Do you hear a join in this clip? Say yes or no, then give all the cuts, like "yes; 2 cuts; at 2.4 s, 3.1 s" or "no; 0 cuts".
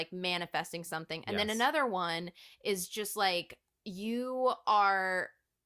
no; 0 cuts